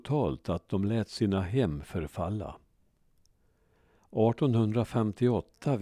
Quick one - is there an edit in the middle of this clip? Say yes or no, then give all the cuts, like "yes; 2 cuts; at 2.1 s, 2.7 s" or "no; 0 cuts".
no; 0 cuts